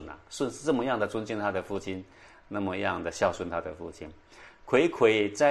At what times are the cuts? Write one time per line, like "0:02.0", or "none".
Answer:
none